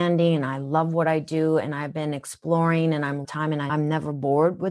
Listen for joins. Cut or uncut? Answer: cut